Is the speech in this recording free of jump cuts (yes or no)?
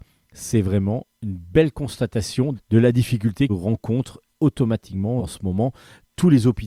no